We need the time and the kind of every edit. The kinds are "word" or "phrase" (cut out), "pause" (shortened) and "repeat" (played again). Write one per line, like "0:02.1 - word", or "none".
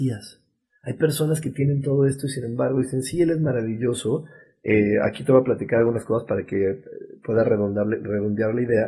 none